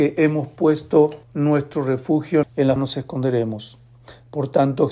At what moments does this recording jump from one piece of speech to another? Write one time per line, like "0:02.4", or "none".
0:01.2
0:02.4
0:02.8